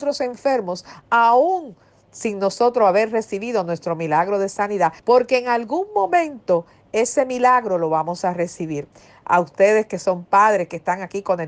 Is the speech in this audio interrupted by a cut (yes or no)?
yes